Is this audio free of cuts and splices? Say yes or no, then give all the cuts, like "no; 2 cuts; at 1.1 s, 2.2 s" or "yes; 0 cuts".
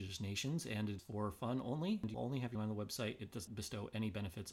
no; 4 cuts; at 1.0 s, 2.1 s, 2.5 s, 3.5 s